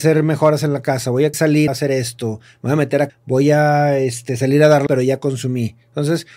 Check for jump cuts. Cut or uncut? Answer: cut